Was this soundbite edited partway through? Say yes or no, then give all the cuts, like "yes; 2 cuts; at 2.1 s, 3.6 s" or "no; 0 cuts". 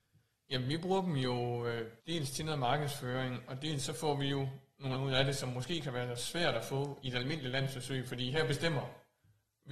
yes; 3 cuts; at 2.0 s, 4.9 s, 7.0 s